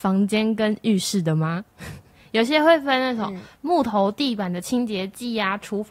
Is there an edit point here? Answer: no; 0 cuts

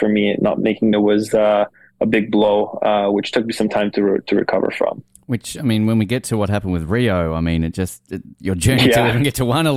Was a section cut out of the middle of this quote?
yes; 1 cut; at 0.9 s

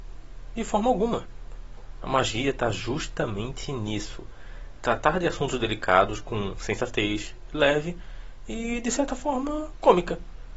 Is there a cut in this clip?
no; 0 cuts

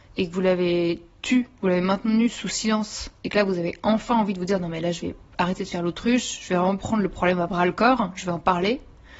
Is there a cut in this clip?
no; 0 cuts

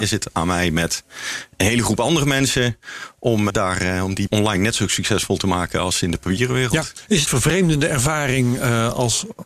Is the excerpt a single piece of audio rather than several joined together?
no; 3 cuts; at 3.5 s, 4.3 s, 7.3 s

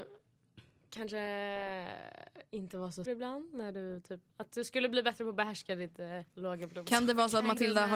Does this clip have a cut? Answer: yes; 3 cuts; at 3.1 s, 4.3 s, 6.3 s

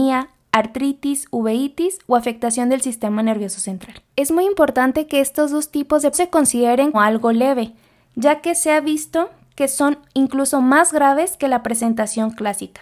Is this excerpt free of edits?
no; 3 cuts; at 4.1 s, 6.1 s, 6.9 s

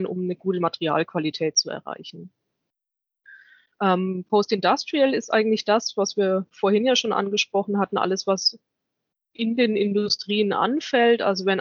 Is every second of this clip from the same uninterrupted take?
yes; 0 cuts

